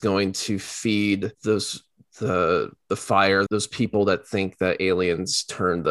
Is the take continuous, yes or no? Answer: no